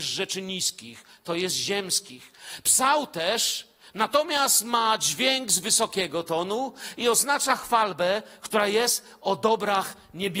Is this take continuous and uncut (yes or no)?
yes